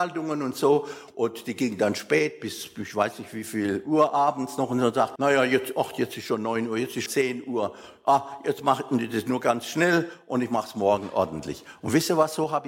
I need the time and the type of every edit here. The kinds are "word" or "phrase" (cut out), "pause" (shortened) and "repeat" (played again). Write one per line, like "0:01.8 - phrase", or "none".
0:05.2 - word
0:07.1 - word